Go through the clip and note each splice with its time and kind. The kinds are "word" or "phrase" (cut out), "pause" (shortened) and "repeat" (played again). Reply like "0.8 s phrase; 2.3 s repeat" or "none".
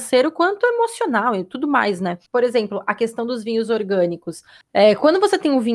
2.3 s pause; 4.6 s pause